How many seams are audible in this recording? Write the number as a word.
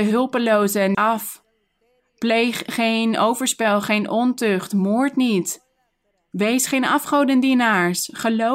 one